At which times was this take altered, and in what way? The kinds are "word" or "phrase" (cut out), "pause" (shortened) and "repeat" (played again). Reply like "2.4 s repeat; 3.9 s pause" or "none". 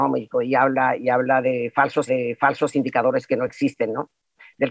2.1 s repeat